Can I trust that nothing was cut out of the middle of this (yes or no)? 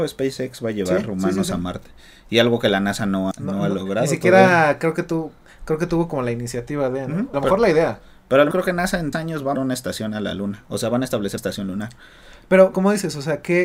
no